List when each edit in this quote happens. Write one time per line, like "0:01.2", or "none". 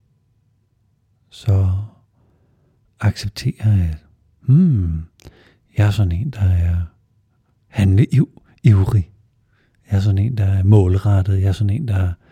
none